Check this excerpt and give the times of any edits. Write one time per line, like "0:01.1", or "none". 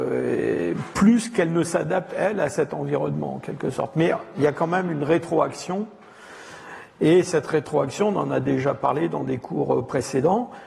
none